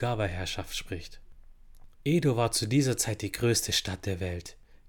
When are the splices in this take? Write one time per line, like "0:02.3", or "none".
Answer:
0:01.9